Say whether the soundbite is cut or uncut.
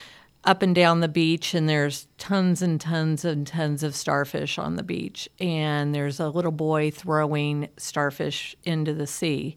uncut